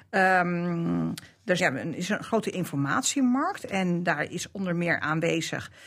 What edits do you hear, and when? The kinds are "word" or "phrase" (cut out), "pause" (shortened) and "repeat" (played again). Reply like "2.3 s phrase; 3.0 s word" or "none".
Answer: 1.6 s word